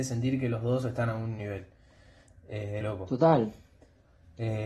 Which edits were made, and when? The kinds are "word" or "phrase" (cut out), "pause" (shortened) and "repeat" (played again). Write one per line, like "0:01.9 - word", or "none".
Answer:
0:01.4 - word
0:02.8 - phrase